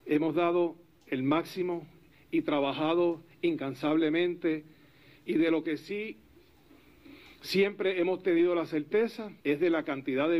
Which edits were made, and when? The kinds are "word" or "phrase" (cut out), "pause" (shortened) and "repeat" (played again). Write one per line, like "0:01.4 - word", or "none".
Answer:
0:09.4 - pause